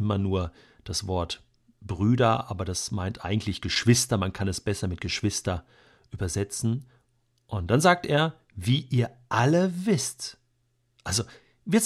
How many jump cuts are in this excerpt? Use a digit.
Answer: 0